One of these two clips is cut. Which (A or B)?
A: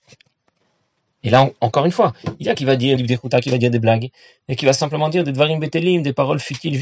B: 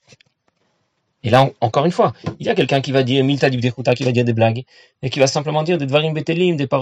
A